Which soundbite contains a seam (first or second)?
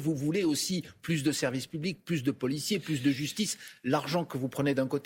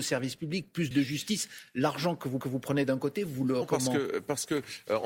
second